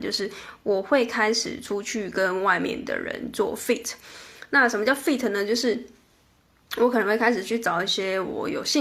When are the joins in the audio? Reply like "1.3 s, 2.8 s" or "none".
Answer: none